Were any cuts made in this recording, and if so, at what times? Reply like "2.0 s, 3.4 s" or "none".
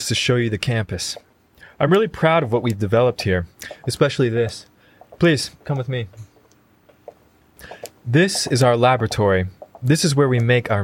none